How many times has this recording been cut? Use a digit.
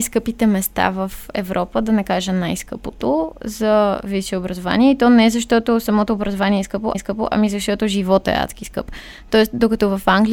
1